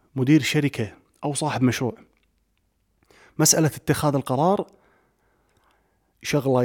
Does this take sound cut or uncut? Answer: uncut